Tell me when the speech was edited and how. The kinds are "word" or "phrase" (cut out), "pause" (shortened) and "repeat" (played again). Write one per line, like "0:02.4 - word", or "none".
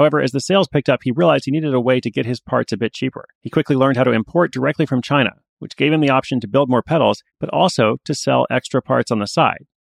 0:03.3 - pause
0:07.3 - pause